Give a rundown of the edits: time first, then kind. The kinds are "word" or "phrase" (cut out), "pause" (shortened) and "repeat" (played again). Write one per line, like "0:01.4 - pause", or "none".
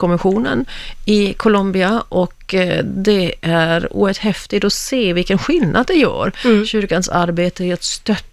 none